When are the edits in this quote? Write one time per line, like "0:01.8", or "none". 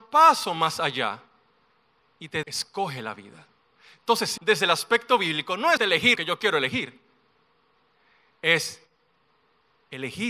0:02.4
0:04.4
0:05.8
0:06.2